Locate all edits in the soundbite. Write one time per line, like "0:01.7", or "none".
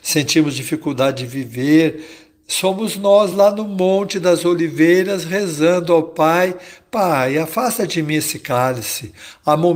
none